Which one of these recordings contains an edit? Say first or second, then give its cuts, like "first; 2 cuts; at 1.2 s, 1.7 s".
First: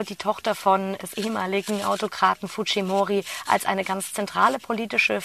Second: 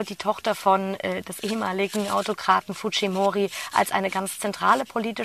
first; 1 cut; at 1.0 s